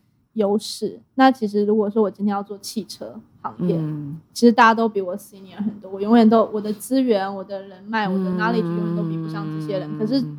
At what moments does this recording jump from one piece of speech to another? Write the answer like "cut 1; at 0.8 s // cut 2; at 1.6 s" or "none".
none